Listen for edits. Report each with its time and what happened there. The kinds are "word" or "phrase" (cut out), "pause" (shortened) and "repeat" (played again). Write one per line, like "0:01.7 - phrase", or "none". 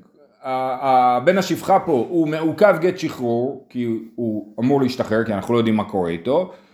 none